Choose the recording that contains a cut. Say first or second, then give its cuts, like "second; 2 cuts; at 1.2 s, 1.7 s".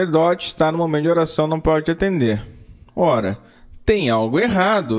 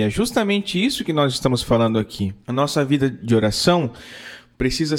second; 1 cut; at 2.4 s